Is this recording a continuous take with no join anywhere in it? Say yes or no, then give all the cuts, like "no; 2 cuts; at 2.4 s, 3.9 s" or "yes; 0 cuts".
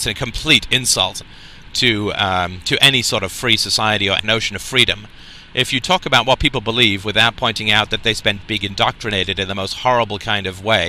no; 2 cuts; at 4.2 s, 8.4 s